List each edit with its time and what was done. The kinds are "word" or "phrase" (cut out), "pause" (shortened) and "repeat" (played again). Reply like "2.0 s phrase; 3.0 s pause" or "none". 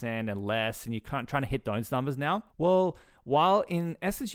2.5 s pause